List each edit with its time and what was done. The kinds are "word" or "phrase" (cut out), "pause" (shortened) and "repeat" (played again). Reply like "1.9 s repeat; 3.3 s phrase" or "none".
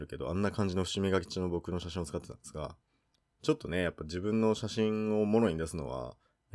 none